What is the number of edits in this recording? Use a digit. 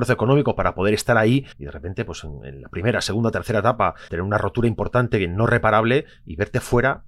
2